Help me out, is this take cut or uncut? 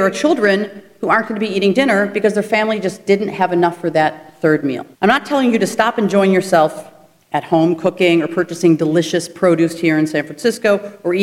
cut